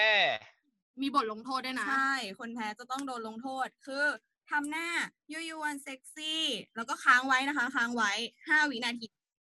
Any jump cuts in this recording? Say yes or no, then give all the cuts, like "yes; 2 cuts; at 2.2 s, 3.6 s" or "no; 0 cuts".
no; 0 cuts